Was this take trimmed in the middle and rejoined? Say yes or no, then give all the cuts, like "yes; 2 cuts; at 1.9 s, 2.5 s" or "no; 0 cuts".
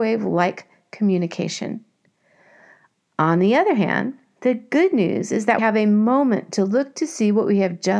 yes; 1 cut; at 5.6 s